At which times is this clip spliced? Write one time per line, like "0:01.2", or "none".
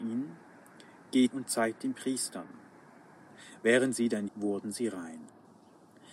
0:01.3
0:01.8
0:04.3